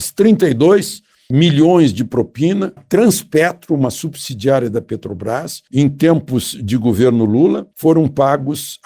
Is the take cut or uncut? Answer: cut